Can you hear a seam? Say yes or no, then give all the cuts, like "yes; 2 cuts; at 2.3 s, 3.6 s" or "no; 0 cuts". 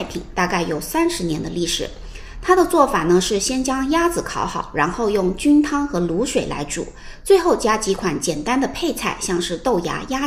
no; 0 cuts